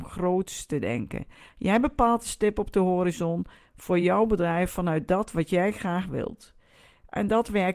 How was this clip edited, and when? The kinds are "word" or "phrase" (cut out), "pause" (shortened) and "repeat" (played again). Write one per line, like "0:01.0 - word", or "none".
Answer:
none